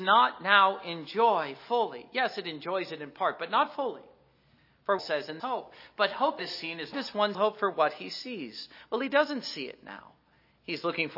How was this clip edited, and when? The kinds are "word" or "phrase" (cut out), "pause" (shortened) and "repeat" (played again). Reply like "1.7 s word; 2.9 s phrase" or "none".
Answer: 5.0 s phrase; 5.4 s word; 6.4 s word; 6.9 s phrase; 7.3 s word